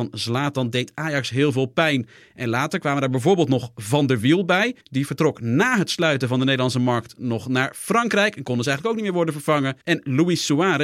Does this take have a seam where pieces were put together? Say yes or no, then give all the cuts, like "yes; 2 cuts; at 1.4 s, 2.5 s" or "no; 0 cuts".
yes; 2 cuts; at 4.8 s, 9.8 s